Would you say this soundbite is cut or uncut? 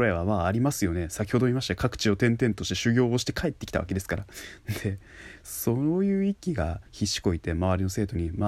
cut